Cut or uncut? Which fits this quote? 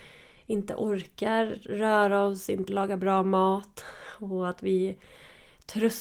cut